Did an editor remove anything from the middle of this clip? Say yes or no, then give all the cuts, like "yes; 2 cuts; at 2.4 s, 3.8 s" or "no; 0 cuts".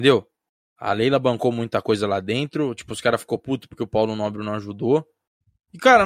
no; 0 cuts